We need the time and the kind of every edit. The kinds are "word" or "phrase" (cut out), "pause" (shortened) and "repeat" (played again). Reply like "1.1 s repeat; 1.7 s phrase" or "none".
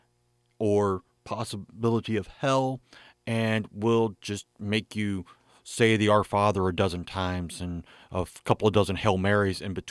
none